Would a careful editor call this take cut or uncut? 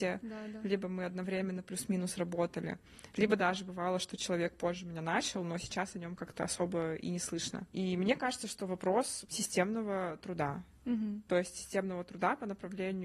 uncut